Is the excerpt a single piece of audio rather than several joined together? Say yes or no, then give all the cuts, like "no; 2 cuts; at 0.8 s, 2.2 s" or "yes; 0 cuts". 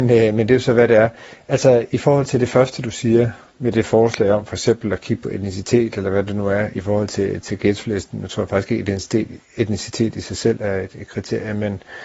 yes; 0 cuts